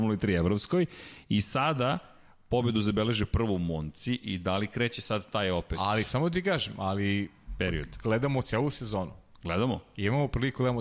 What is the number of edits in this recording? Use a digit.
0